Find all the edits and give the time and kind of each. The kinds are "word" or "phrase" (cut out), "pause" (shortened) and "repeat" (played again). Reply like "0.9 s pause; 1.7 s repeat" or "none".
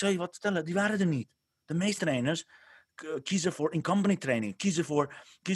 2.0 s word